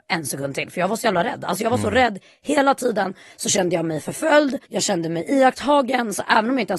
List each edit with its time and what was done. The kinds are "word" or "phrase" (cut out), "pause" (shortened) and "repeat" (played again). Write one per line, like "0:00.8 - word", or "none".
0:04.6 - pause